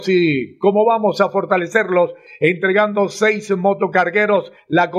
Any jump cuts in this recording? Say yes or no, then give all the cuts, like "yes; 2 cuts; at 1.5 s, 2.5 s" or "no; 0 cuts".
no; 0 cuts